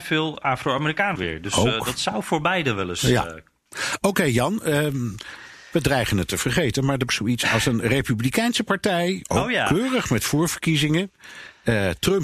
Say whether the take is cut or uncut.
cut